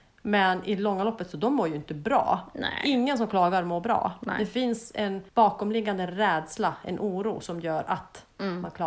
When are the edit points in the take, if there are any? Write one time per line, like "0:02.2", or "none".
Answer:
0:05.3